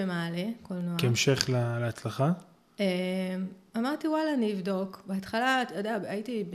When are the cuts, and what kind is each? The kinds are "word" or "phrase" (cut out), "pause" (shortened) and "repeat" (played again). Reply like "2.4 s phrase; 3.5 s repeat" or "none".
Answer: none